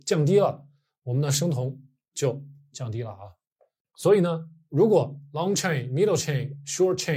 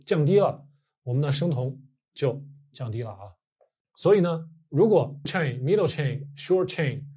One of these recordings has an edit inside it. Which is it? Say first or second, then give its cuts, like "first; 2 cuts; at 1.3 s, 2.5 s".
second; 1 cut; at 5.3 s